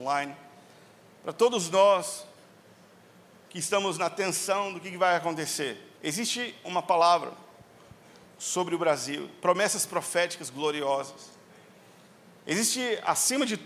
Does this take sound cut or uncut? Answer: cut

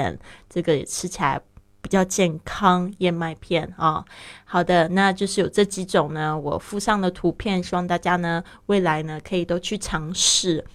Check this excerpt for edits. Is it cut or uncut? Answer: uncut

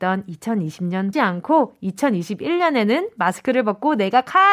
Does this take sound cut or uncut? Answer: cut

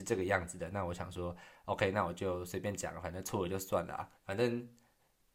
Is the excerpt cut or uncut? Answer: cut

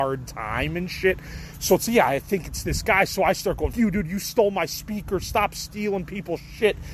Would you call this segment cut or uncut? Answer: cut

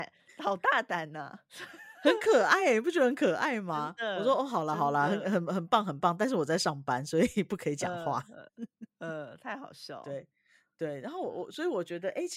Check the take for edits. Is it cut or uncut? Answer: uncut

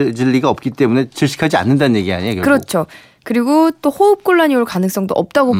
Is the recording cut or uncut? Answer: uncut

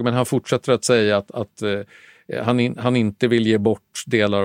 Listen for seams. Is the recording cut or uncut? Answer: uncut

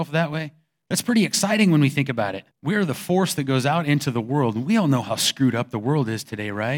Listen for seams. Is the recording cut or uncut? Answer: cut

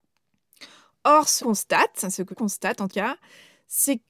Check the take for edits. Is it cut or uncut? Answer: cut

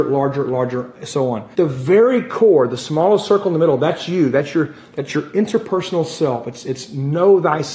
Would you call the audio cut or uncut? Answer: cut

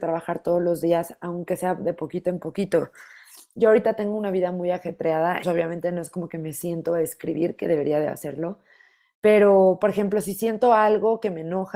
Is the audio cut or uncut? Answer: cut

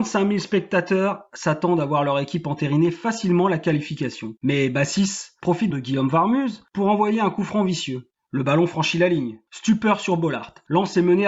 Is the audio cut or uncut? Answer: cut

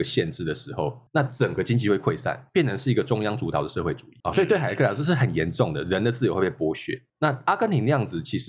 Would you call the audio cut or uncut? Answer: cut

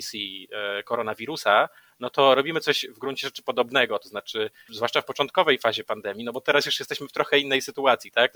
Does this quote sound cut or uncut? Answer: uncut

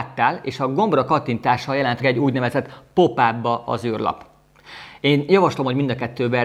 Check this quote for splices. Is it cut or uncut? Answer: cut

